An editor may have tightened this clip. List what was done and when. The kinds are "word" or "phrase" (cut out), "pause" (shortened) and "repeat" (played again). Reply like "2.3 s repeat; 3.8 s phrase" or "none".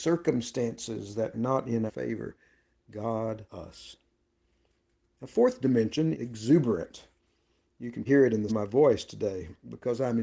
1.3 s word; 1.9 s word; 3.5 s word; 6.1 s word; 8.1 s word; 8.5 s word